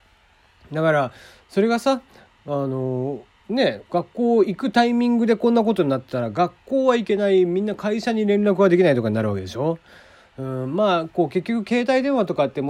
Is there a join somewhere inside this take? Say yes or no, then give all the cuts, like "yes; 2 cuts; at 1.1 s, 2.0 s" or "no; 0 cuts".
yes; 1 cut; at 3.4 s